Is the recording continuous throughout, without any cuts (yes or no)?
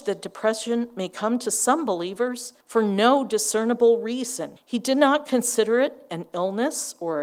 no